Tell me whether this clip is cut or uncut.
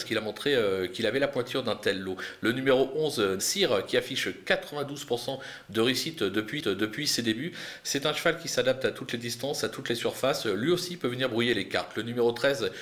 cut